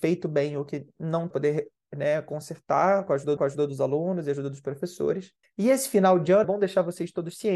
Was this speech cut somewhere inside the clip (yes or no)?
yes